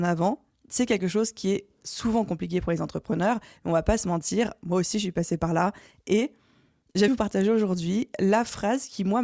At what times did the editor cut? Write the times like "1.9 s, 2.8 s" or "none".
7.1 s